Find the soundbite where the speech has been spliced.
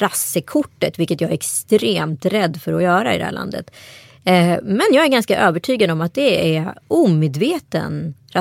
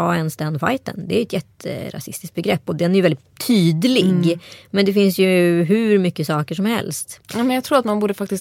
second; 1 cut; at 7.2 s

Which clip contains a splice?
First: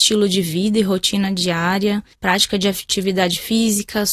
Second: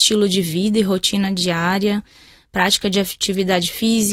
first; 1 cut; at 2.1 s

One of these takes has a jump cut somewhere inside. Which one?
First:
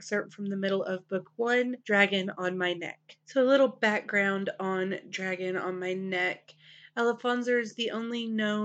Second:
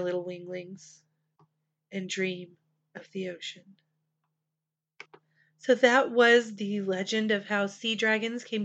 first; 2 cuts; at 1.8 s, 3.2 s

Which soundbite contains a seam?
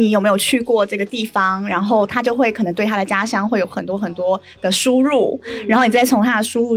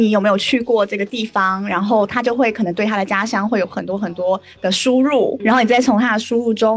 second; 1 cut; at 5.4 s

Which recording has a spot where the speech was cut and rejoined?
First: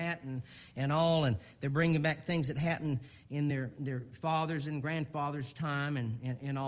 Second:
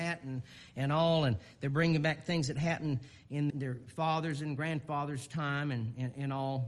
second; 1 cut; at 3.5 s

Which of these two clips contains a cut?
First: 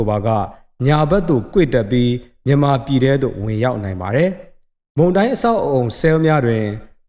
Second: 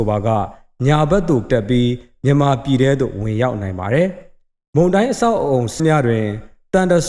second; 2 cuts; at 1.5 s, 5.8 s

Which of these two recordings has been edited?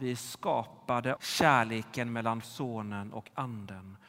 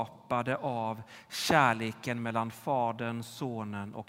first; 2 cuts; at 1.2 s, 2.4 s

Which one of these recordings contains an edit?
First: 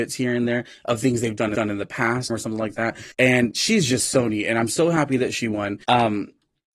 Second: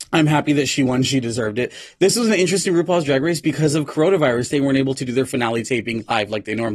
first; 4 cuts; at 1.5 s, 2.3 s, 3.1 s, 5.8 s

